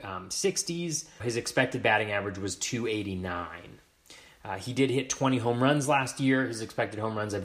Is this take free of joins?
no; 1 cut; at 1.2 s

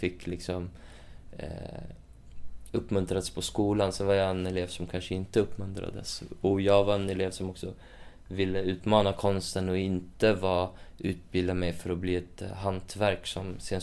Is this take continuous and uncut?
yes; 0 cuts

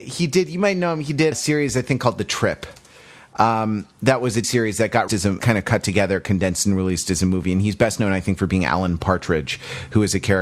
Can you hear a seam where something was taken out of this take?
yes; 4 cuts; at 1.3 s, 4.4 s, 5.1 s, 5.4 s

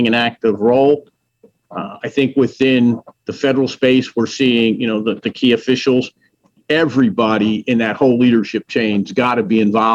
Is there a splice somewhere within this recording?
no; 0 cuts

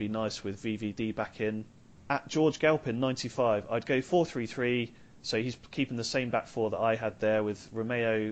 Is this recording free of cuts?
yes; 0 cuts

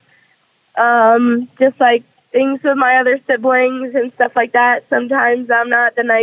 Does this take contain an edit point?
no; 0 cuts

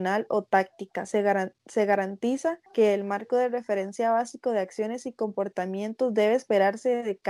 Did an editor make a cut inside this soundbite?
yes; 1 cut; at 2.7 s

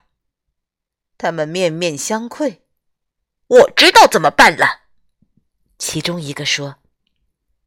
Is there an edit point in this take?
yes; 1 cut; at 2.8 s

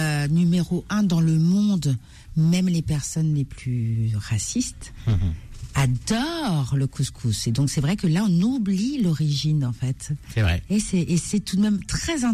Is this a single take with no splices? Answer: yes; 0 cuts

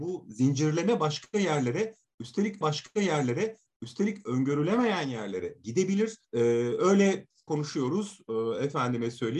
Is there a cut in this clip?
yes; 3 cuts; at 2.6 s, 6.2 s, 7.5 s

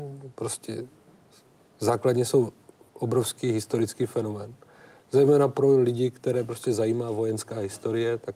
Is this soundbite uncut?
yes; 0 cuts

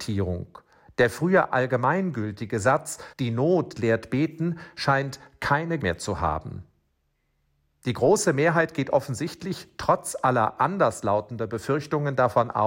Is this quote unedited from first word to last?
no; 2 cuts; at 3.1 s, 5.8 s

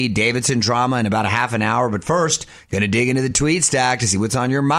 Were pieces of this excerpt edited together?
no; 0 cuts

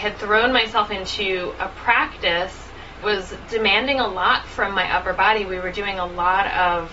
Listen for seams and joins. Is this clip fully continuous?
no; 1 cut; at 3.0 s

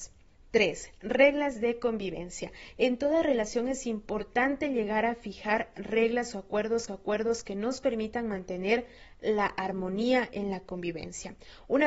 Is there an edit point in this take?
yes; 1 cut; at 6.9 s

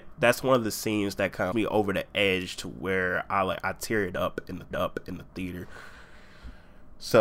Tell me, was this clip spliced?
yes; 2 cuts; at 1.5 s, 4.7 s

